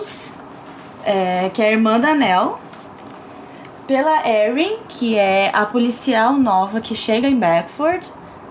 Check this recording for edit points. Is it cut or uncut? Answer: uncut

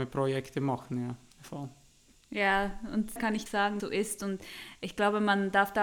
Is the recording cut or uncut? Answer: cut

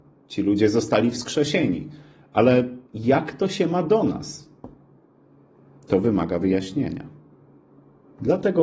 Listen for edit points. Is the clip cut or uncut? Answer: uncut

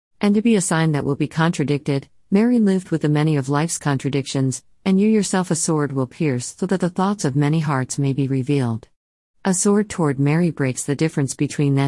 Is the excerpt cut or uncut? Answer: uncut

